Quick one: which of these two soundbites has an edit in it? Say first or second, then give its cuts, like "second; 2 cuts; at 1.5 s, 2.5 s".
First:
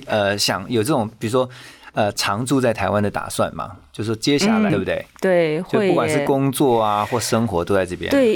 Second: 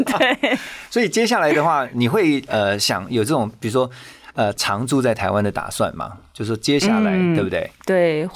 first; 1 cut; at 4.7 s